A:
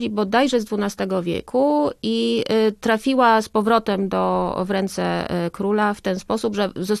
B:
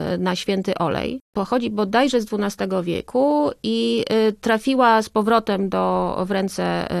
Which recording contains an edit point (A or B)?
B